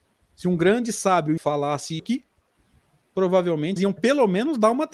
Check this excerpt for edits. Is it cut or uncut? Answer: cut